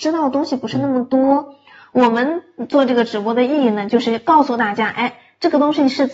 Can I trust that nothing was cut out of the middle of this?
yes; 0 cuts

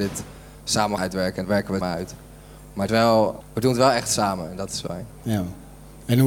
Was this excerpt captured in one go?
no; 6 cuts; at 1.0 s, 1.4 s, 1.8 s, 2.9 s, 3.4 s, 4.9 s

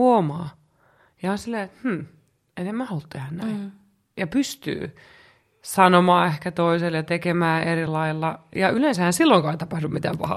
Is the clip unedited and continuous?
yes; 0 cuts

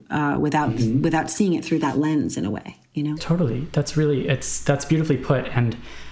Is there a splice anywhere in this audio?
no; 0 cuts

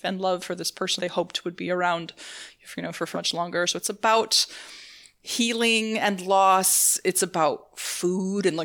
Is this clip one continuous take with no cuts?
no; 2 cuts; at 1.0 s, 3.1 s

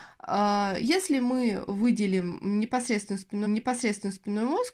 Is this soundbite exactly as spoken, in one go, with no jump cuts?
no; 1 cut; at 3.5 s

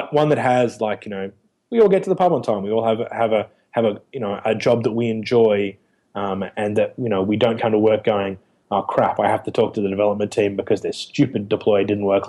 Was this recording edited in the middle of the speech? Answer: no; 0 cuts

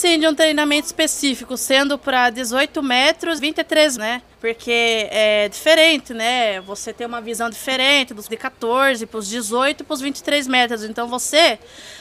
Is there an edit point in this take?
yes; 4 cuts; at 3.4 s, 4.0 s, 4.3 s, 8.3 s

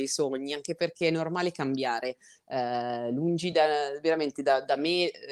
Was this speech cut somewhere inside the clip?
no; 0 cuts

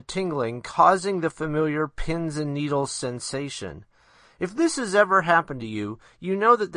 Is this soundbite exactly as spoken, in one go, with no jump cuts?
yes; 0 cuts

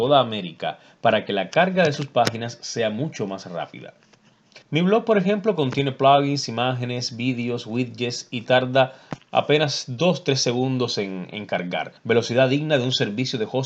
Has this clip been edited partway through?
yes; 2 cuts; at 4.6 s, 12.0 s

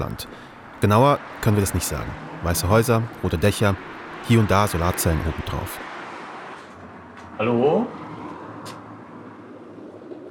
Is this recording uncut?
yes; 0 cuts

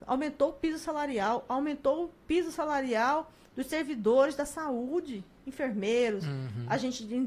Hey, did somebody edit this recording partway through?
no; 0 cuts

